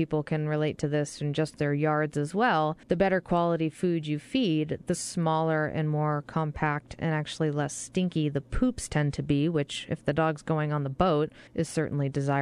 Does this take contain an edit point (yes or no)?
yes